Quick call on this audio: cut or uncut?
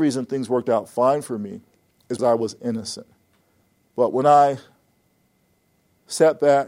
cut